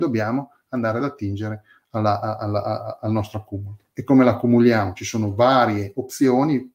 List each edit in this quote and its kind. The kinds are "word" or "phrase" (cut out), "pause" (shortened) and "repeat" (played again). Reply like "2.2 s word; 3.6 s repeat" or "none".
none

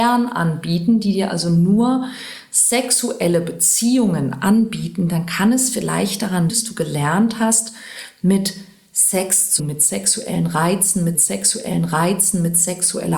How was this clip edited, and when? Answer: 6.5 s word; 9.6 s word; 11.1 s repeat

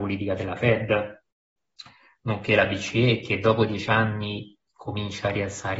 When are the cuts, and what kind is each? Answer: none

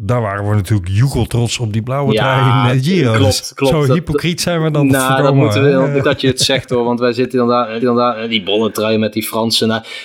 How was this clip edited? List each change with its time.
2.7 s word; 6.0 s word; 7.8 s repeat

